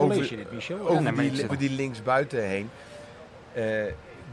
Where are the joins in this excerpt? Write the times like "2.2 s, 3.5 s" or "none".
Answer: 1.5 s

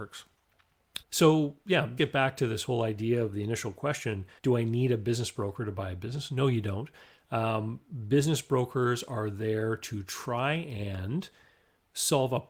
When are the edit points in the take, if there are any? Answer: 1.0 s, 2.0 s, 4.4 s

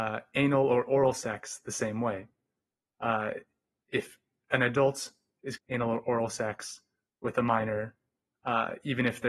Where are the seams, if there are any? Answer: 5.6 s

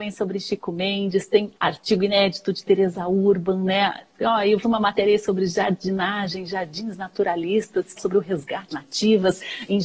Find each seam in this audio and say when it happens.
1.5 s, 4.6 s, 8.0 s, 8.7 s

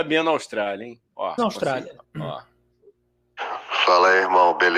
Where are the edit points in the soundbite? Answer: 1.4 s, 2.0 s

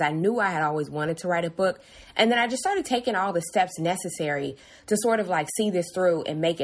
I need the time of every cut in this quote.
none

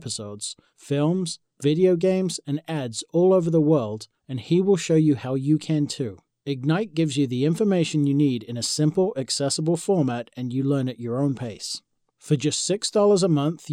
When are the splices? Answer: none

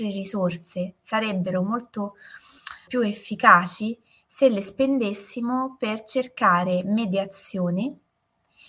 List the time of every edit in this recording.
2.9 s

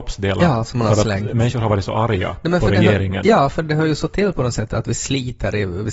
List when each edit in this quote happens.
none

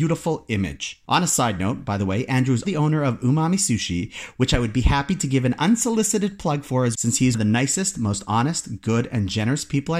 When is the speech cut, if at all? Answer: 1.0 s, 2.6 s, 6.9 s, 7.3 s

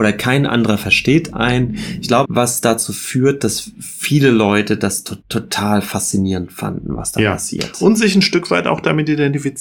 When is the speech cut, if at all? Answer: 2.2 s, 5.2 s

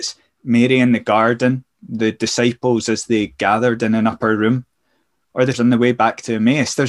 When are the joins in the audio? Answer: 5.5 s

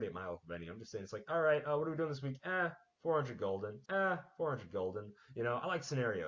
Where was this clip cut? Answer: 3.9 s

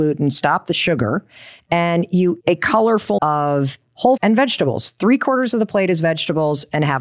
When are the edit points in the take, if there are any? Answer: 2.4 s, 3.2 s, 4.2 s

